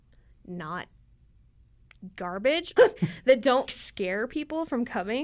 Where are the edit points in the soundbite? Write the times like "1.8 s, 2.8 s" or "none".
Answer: 2.8 s, 3.7 s